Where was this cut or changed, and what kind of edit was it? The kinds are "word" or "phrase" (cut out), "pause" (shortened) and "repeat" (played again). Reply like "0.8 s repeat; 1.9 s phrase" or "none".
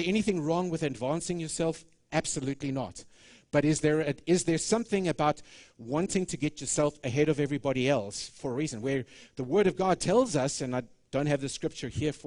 none